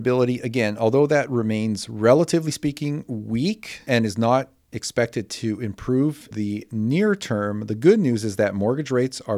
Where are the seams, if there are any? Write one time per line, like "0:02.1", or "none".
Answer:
0:06.3